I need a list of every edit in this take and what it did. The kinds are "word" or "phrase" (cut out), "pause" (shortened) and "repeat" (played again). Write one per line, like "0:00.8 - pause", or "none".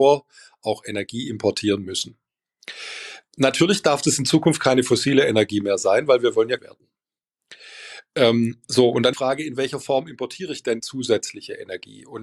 0:06.6 - word
0:08.6 - pause
0:09.1 - phrase
0:10.8 - word